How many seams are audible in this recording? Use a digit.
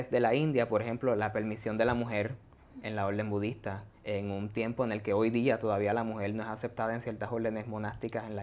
1